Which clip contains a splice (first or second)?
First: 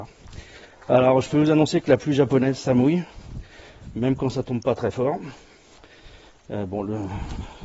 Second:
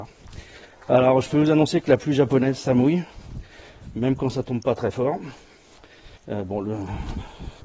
second